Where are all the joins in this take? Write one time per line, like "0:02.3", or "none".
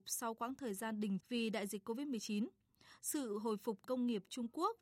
0:01.2
0:03.8